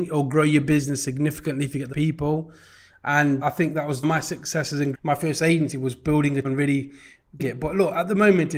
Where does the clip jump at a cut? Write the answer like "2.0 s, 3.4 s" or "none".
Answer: 1.9 s, 3.4 s, 4.0 s, 4.9 s, 6.4 s, 7.4 s